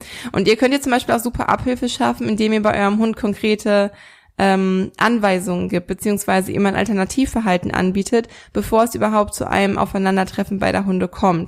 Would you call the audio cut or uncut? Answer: uncut